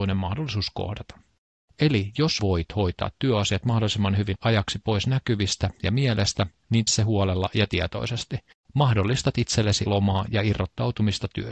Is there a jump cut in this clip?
yes; 4 cuts; at 2.4 s, 4.4 s, 6.9 s, 9.9 s

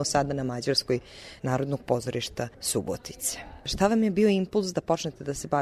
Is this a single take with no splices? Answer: no; 2 cuts; at 1.4 s, 2.5 s

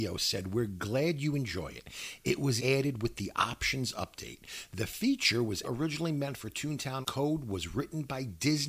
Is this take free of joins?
no; 3 cuts; at 2.6 s, 5.6 s, 7.0 s

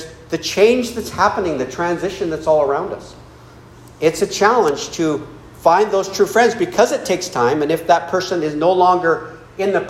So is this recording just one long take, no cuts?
yes; 0 cuts

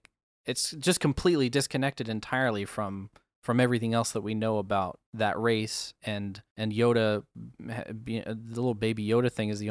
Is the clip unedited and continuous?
no; 3 cuts; at 5.1 s, 6.0 s, 7.5 s

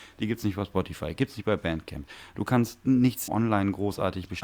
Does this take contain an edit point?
yes; 1 cut; at 3.3 s

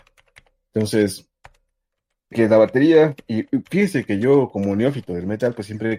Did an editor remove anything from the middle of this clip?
yes; 1 cut; at 2.3 s

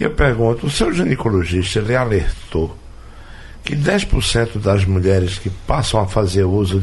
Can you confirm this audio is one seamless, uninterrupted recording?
yes; 0 cuts

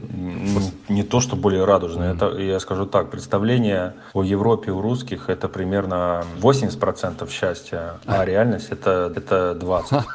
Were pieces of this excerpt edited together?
yes; 1 cut; at 9.1 s

